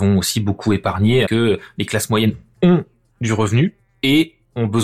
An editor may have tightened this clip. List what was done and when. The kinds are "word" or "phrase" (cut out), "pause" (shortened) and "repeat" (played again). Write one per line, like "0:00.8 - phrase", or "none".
0:01.3 - word